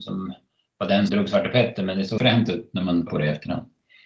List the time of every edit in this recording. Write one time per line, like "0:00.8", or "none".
0:01.1
0:02.2
0:03.1